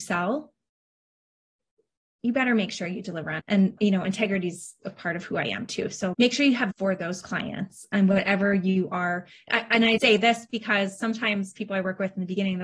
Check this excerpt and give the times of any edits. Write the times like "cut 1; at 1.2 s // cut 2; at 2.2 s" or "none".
cut 1; at 3.4 s // cut 2; at 3.8 s // cut 3; at 6.1 s // cut 4; at 6.7 s // cut 5; at 10.0 s